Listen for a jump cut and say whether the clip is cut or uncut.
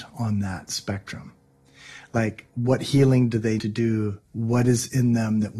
cut